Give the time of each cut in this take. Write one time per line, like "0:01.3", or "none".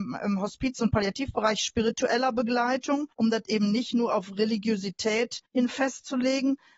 0:03.1
0:05.5